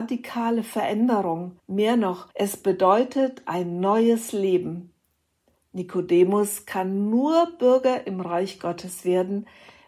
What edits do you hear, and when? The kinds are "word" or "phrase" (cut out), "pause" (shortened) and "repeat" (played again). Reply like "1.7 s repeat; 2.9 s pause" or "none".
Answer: 1.6 s pause; 2.3 s pause